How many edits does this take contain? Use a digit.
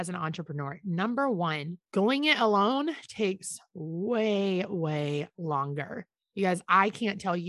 2